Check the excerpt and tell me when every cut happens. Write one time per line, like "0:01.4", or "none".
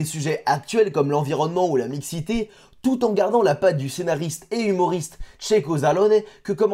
none